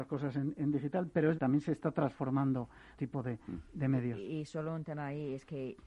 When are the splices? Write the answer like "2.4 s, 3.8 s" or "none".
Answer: 1.4 s, 3.0 s